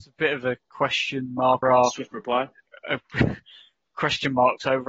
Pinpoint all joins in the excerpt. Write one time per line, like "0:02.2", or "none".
0:01.6